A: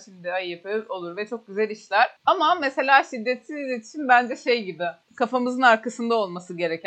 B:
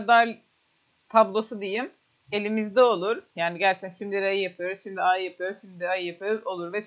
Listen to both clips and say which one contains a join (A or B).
A